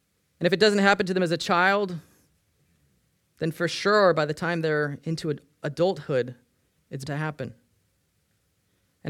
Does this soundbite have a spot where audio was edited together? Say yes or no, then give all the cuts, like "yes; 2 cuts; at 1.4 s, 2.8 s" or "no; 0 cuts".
yes; 1 cut; at 7.1 s